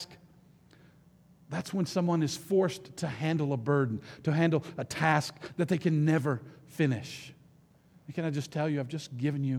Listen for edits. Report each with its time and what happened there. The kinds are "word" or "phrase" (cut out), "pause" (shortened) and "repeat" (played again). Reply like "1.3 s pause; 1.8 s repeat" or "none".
none